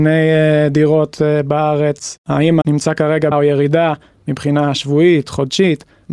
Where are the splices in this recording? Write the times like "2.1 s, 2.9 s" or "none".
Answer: 2.6 s, 3.3 s

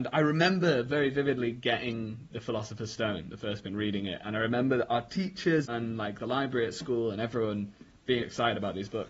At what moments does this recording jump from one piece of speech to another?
2.3 s, 3.6 s, 5.7 s, 8.2 s

